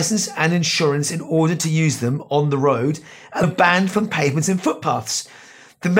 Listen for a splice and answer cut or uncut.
cut